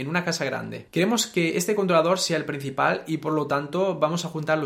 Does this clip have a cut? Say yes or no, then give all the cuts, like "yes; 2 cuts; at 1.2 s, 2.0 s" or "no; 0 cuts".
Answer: no; 0 cuts